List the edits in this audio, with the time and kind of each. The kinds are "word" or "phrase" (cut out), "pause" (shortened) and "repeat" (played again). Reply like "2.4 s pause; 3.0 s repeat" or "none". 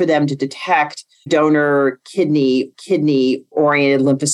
1.3 s word; 2.7 s repeat